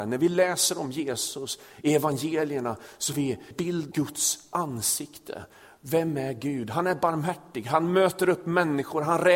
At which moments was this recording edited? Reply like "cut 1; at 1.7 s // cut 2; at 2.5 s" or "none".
cut 1; at 3.1 s // cut 2; at 3.5 s // cut 3; at 3.9 s